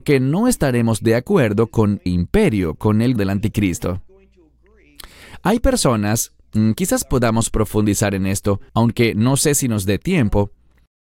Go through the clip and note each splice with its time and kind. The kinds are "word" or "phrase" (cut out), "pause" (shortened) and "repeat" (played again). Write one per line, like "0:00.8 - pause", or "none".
0:02.1 - word
0:03.2 - word
0:08.7 - pause